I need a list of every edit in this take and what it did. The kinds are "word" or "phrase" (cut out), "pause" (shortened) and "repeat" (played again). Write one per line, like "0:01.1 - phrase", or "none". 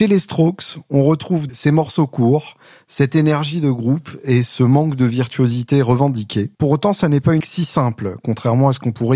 0:01.5 - word
0:06.5 - pause
0:07.4 - word